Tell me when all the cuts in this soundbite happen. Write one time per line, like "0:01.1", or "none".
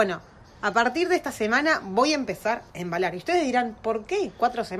0:02.7